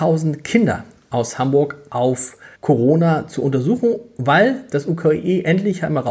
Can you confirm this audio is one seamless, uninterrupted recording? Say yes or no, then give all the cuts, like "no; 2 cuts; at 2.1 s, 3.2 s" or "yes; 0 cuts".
no; 1 cut; at 2.5 s